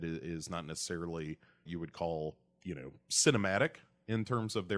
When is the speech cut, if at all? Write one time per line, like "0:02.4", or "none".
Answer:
0:01.7